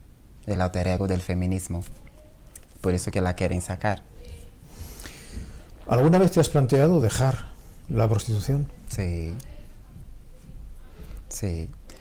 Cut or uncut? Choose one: uncut